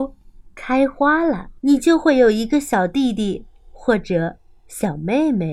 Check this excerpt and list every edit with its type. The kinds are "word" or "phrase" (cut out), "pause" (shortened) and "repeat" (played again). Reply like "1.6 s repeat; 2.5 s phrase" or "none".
1.6 s pause